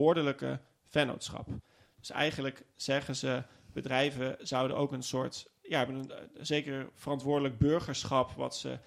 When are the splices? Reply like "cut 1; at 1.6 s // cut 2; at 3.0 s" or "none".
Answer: none